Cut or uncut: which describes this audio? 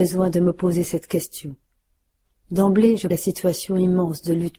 cut